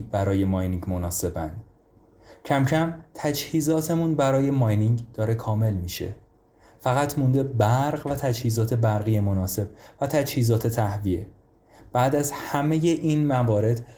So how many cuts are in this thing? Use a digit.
0